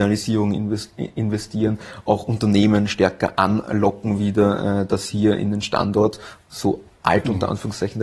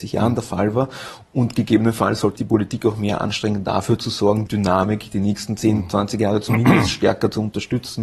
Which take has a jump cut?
second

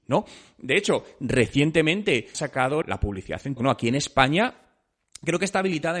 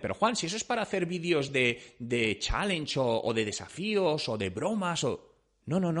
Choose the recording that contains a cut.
first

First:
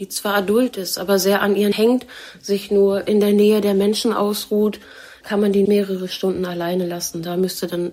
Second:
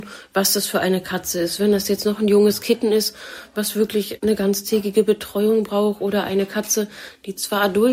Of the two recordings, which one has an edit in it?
first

